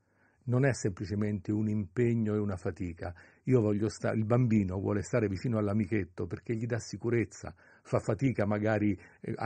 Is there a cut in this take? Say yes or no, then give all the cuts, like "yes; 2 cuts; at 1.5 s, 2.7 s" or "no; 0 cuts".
no; 0 cuts